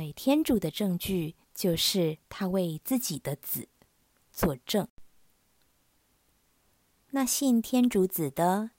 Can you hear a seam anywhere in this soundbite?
yes; 1 cut; at 1.4 s

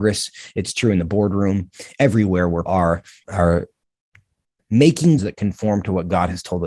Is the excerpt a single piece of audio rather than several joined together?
no; 3 cuts; at 2.7 s, 3.2 s, 5.2 s

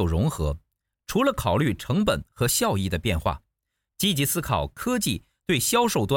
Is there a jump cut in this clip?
no; 0 cuts

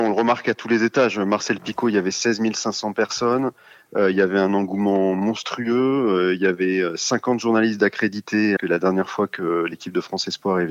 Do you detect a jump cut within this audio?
yes; 1 cut; at 8.6 s

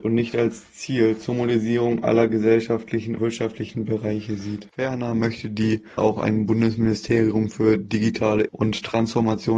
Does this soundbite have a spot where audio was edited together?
yes; 4 cuts; at 3.2 s, 4.7 s, 6.0 s, 8.5 s

